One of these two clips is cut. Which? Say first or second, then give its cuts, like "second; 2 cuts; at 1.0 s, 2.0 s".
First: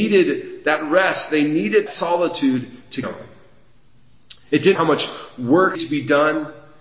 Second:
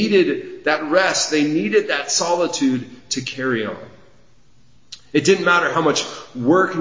first; 4 cuts; at 1.9 s, 3.0 s, 4.8 s, 5.8 s